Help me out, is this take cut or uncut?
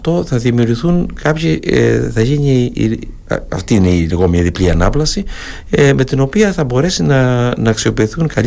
uncut